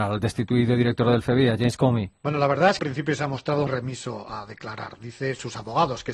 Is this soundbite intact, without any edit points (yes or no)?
no